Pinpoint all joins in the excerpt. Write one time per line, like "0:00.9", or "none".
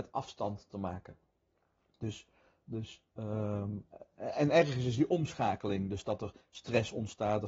none